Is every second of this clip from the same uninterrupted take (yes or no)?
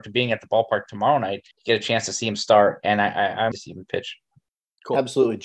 no